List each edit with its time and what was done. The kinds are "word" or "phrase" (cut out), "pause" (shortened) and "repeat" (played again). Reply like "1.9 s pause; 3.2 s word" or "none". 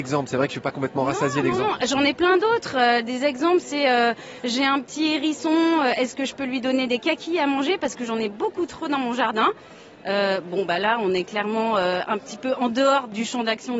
none